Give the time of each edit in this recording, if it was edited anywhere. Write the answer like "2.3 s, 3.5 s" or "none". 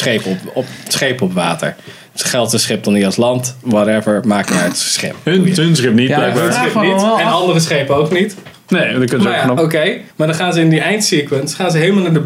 10.1 s